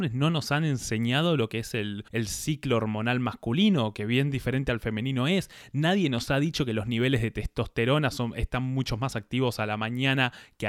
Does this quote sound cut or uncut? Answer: cut